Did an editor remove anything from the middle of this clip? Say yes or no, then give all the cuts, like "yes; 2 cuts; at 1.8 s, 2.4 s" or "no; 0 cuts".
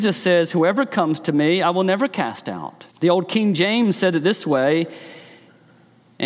yes; 1 cut; at 2.9 s